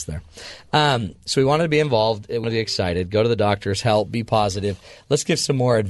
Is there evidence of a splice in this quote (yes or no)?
yes